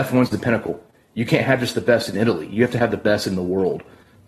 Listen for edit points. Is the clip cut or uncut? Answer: uncut